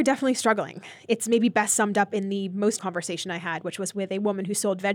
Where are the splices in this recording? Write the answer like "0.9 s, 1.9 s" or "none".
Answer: 2.8 s

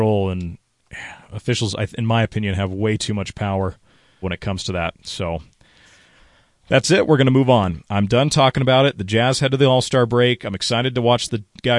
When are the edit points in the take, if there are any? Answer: 4.2 s

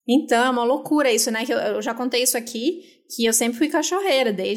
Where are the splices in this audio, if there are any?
none

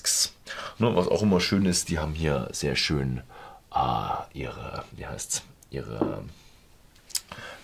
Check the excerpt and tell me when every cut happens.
none

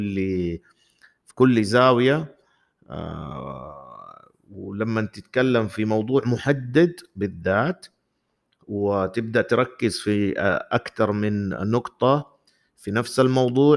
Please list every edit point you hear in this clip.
none

